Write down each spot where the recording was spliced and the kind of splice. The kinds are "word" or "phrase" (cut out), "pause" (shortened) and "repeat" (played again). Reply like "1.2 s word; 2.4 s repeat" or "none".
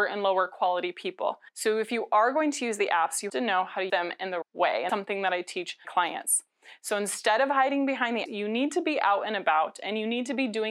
1.5 s pause; 3.3 s word; 3.9 s word; 4.4 s word; 4.9 s word; 5.8 s word; 8.3 s word